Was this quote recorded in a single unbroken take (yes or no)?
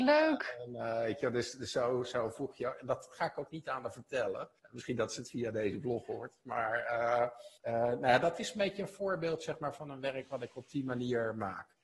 no